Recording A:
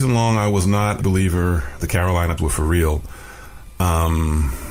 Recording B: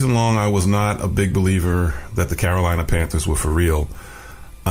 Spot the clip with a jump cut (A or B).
A